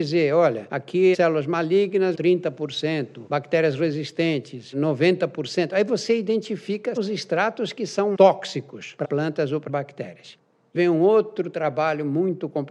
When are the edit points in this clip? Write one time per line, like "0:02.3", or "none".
0:01.1
0:02.1
0:07.0
0:08.1
0:09.0
0:09.7
0:10.8

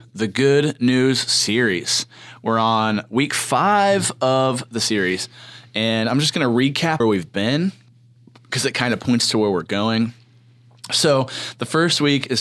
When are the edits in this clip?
0:07.0

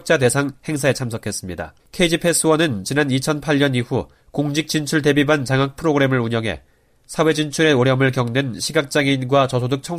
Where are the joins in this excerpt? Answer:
0:01.8

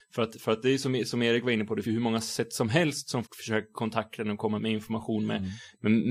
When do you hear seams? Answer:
0:01.8
0:03.2
0:04.6

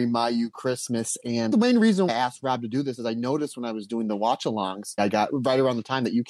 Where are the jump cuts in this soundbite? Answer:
0:01.5
0:02.1
0:05.0

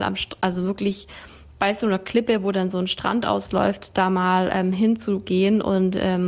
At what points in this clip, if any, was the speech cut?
none

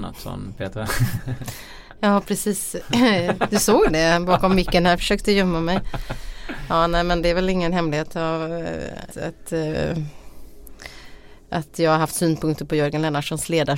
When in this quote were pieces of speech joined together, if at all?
0:09.1

